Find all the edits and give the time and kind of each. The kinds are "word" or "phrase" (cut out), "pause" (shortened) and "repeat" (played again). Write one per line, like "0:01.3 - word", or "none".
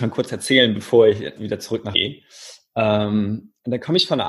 0:01.4 - word
0:01.9 - word